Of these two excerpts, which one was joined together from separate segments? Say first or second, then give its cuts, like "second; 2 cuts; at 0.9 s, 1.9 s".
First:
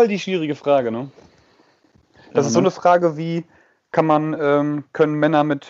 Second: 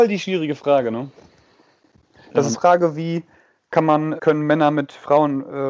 second; 2 cuts; at 2.5 s, 4.2 s